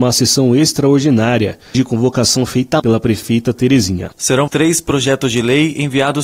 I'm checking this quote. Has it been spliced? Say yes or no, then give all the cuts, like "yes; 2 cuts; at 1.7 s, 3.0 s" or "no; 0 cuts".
yes; 3 cuts; at 1.7 s, 2.8 s, 4.5 s